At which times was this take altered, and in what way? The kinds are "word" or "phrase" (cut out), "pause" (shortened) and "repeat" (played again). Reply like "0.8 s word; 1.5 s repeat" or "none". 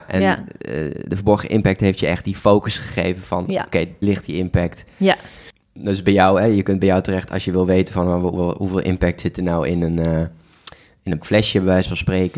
4.0 s word; 11.2 s word